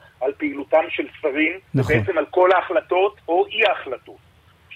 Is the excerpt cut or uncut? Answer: cut